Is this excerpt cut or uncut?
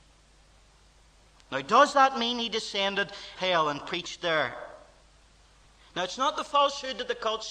cut